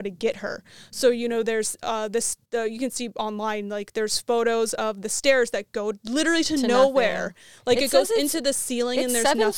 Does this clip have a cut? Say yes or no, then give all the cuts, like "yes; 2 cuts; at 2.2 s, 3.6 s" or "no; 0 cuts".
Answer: yes; 1 cut; at 2.5 s